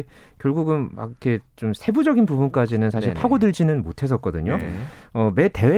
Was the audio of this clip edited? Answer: no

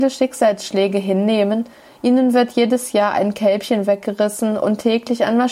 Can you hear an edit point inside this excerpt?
no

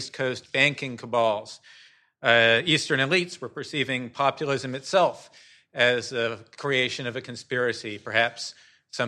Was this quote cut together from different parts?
no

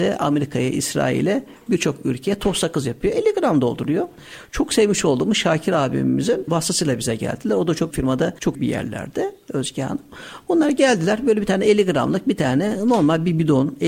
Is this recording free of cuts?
no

